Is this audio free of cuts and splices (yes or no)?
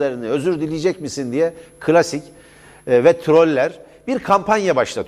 yes